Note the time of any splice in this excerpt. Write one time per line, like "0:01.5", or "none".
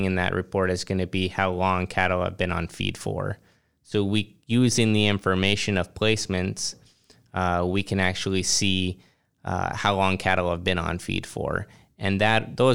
none